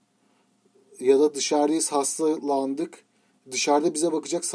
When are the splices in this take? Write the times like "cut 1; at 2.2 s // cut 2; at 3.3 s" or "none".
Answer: none